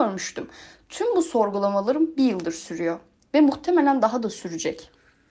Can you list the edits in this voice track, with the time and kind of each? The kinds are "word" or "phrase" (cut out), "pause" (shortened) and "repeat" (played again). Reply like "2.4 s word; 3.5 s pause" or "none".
none